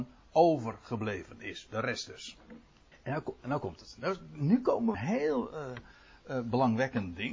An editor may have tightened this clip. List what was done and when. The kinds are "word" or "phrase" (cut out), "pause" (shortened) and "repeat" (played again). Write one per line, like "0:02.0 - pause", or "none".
0:02.9 - pause
0:04.9 - phrase